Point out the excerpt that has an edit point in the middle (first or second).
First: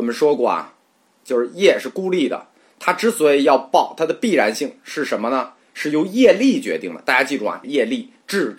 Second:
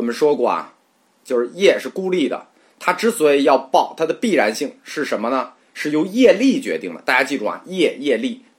first